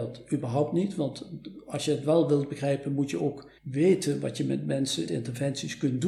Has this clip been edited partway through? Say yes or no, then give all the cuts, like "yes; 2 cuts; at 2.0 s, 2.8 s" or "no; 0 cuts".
yes; 2 cuts; at 3.6 s, 5.1 s